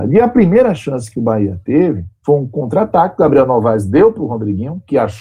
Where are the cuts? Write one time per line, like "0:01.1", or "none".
0:02.2